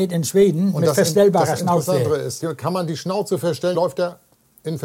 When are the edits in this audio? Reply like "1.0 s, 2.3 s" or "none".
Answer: 2.4 s, 3.7 s